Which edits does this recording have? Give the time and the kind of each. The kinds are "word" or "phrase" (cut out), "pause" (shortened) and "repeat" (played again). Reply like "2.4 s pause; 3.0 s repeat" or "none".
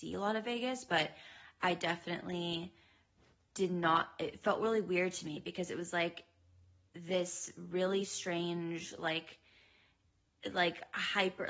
none